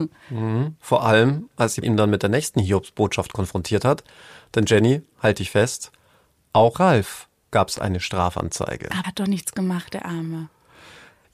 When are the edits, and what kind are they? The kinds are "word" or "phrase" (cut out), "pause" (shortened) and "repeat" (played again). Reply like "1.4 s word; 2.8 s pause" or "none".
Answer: 1.8 s word; 6.7 s word; 9.0 s word